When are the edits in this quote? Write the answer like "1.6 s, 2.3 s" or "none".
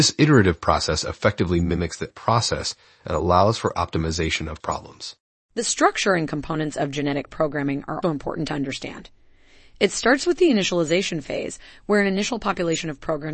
2.1 s, 4.6 s, 8.0 s